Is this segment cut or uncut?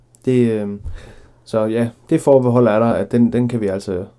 uncut